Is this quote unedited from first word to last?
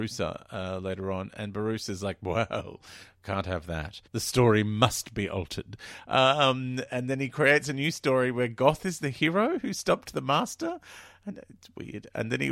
no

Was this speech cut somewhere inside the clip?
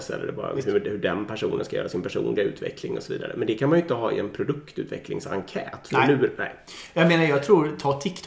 no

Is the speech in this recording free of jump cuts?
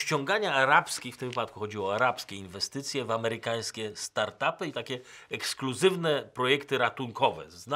yes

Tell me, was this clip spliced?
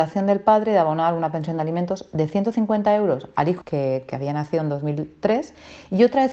yes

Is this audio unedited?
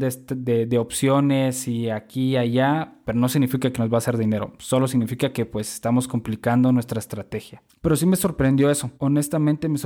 no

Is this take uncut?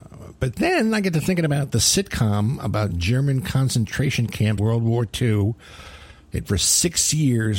no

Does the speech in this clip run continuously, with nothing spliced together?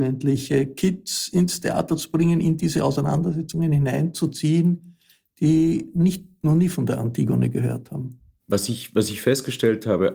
yes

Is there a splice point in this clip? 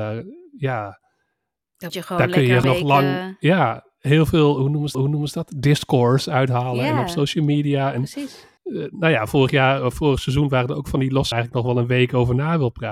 yes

